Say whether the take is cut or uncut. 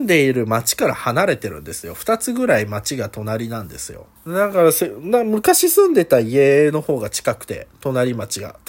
cut